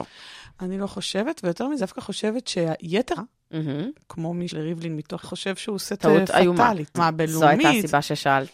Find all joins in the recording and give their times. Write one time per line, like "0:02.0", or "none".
0:01.8
0:03.2
0:04.5
0:05.2
0:06.0
0:06.9